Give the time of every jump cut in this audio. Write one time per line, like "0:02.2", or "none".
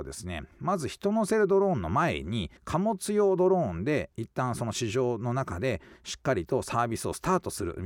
0:02.6